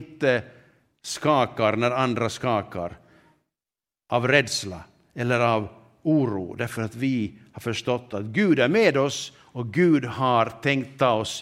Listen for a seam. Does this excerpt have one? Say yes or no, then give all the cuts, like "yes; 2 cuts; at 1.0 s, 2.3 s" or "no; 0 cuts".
no; 0 cuts